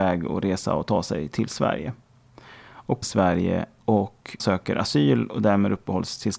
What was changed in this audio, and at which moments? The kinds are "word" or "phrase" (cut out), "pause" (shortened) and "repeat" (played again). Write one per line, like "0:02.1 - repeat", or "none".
0:03.0 - phrase
0:04.4 - word